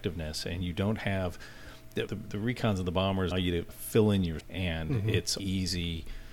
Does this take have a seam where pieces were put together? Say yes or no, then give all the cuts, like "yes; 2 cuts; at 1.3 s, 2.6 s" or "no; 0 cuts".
yes; 5 cuts; at 2.1 s, 3.3 s, 3.7 s, 4.4 s, 5.4 s